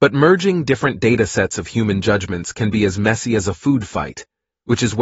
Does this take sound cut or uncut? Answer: uncut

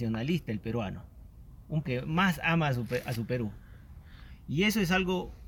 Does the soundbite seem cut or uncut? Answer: cut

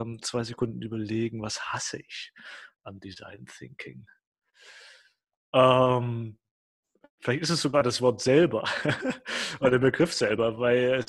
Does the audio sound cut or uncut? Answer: uncut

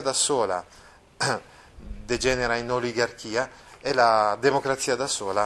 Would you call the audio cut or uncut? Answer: uncut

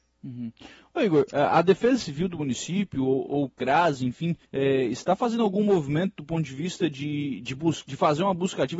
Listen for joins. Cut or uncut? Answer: cut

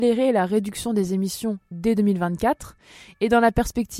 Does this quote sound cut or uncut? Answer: uncut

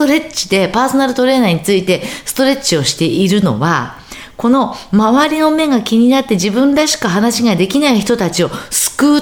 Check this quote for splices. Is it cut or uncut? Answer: uncut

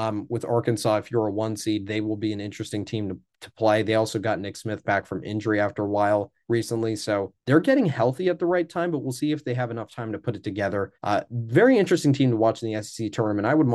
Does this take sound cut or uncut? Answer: cut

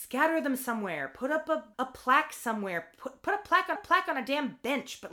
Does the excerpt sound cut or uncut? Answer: cut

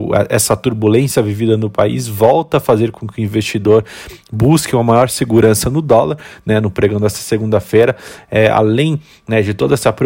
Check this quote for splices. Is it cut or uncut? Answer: uncut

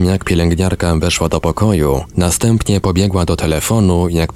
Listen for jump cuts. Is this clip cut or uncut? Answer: uncut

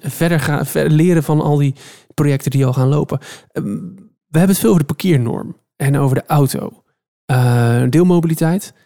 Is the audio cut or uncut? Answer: uncut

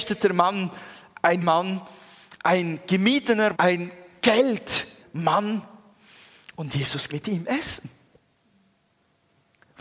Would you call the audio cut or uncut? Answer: cut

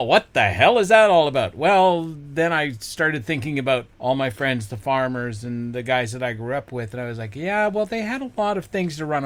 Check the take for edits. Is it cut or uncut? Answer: cut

